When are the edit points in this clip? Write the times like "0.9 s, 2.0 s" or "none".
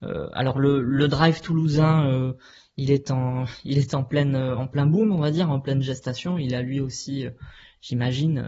none